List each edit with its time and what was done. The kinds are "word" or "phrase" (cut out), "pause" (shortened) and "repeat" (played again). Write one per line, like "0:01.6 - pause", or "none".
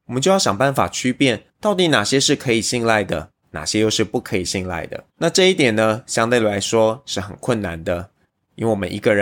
0:01.5 - pause
0:05.1 - pause